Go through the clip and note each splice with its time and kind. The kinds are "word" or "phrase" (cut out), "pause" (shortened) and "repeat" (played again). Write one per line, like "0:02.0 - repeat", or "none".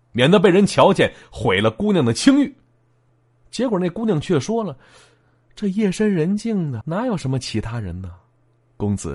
0:06.8 - word

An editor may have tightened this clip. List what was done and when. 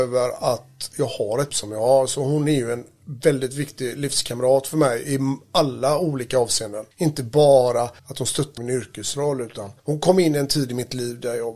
0:01.5 - word
0:06.9 - pause
0:08.0 - pause
0:08.6 - phrase
0:09.8 - pause

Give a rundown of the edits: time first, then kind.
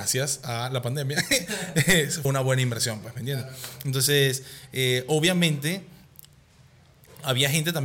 0:02.2 - word

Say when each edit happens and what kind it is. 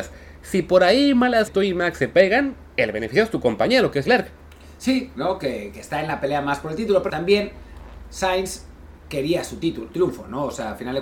0:01.5 - word
0:04.0 - word
0:07.1 - word
0:09.9 - word

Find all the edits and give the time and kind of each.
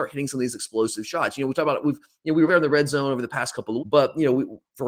0:02.5 - word
0:03.8 - word

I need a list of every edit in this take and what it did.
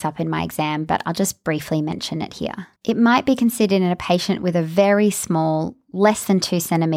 0:02.8 - pause

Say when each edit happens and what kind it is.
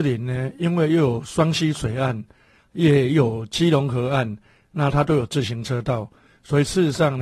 none

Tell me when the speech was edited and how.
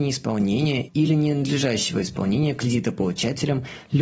none

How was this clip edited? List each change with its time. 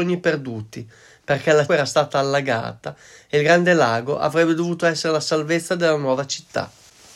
0:01.7 - phrase

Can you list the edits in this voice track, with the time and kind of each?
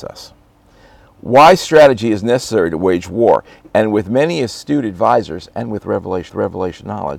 0:06.3 - repeat

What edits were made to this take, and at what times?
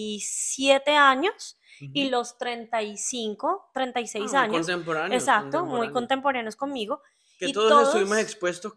none

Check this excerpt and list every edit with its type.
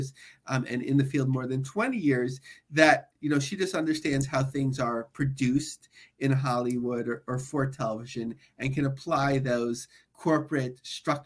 none

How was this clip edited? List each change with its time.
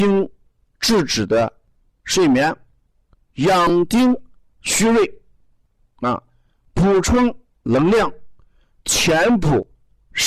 none

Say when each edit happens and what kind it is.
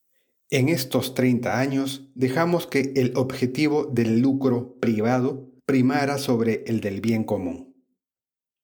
0:05.6 - pause

